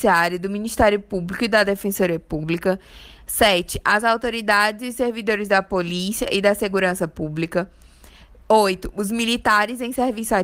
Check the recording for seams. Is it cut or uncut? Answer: uncut